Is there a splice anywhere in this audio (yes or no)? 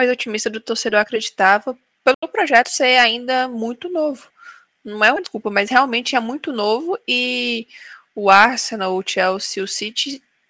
no